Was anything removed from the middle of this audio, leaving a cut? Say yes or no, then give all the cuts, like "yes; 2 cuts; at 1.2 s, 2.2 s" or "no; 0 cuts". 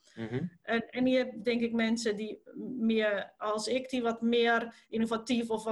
no; 0 cuts